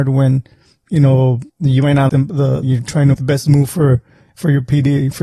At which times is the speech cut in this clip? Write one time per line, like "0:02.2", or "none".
0:01.5
0:02.1
0:02.6
0:03.1